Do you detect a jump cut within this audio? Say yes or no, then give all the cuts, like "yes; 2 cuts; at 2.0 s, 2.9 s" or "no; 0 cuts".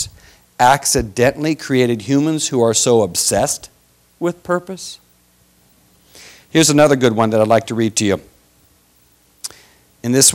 no; 0 cuts